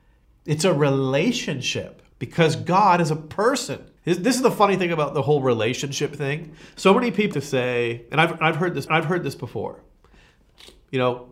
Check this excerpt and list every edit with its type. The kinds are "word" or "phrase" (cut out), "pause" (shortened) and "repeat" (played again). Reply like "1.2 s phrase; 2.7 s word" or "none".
2.1 s pause; 4.0 s pause; 7.3 s word; 8.9 s repeat